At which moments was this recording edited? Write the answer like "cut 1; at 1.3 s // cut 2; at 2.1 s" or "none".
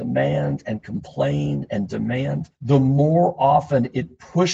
cut 1; at 2.6 s